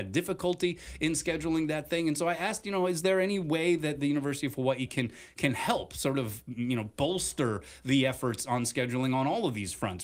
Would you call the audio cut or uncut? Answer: uncut